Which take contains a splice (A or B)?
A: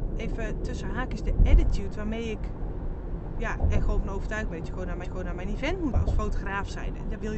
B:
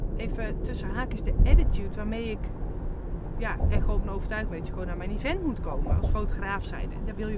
A